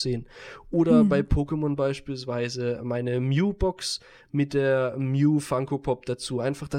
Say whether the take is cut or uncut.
uncut